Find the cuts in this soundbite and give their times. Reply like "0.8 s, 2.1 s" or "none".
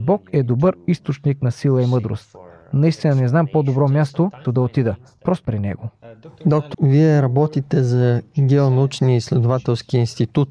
4.4 s, 5.4 s, 6.7 s